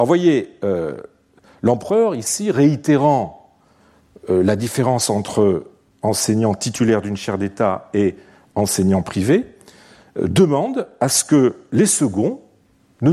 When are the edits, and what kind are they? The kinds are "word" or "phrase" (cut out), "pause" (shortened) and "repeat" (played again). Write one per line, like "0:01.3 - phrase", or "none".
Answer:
none